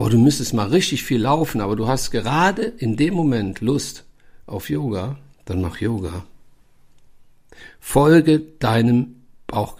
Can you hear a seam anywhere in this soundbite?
no; 0 cuts

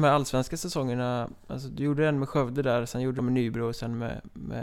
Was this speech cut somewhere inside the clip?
yes; 1 cut; at 3.2 s

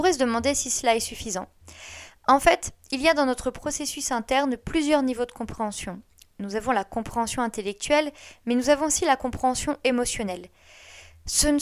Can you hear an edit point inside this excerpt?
no; 0 cuts

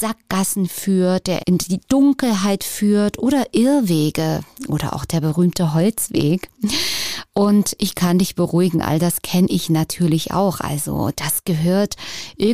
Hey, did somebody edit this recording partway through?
yes; 1 cut; at 1.4 s

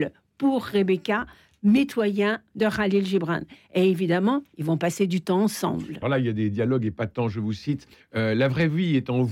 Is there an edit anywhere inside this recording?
yes; 2 cuts; at 6.0 s, 7.9 s

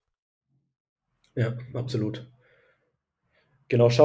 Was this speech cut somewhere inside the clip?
no; 0 cuts

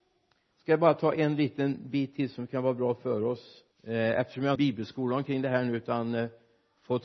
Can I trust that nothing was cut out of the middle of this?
no; 2 cuts; at 3.7 s, 4.6 s

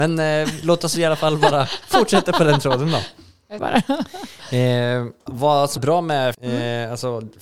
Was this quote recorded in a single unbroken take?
no; 4 cuts; at 3.6 s, 5.3 s, 5.8 s, 6.3 s

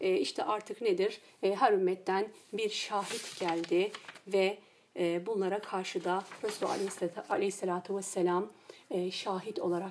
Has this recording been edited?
no; 0 cuts

